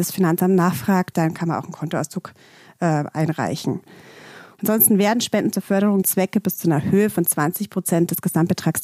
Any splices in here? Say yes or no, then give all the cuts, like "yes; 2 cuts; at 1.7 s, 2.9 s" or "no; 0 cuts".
yes; 2 cuts; at 1.1 s, 6.0 s